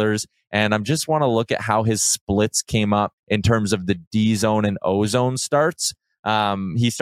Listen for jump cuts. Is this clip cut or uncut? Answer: cut